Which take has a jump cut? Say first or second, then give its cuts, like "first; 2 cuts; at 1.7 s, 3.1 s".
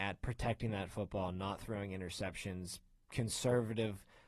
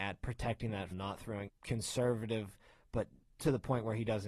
second; 3 cuts; at 0.9 s, 1.5 s, 3.3 s